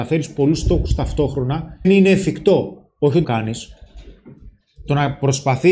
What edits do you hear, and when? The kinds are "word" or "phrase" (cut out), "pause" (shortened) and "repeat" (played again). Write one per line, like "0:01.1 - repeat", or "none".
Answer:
0:01.8 - word
0:03.2 - phrase